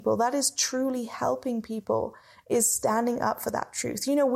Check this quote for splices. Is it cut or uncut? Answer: uncut